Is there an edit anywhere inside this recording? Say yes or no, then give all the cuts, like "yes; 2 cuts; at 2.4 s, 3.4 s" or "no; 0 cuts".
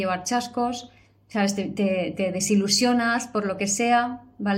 no; 0 cuts